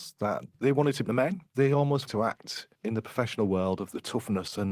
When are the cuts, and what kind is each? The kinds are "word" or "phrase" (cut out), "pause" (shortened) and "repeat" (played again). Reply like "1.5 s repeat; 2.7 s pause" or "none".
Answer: 1.0 s word; 1.5 s pause; 2.1 s word; 2.7 s pause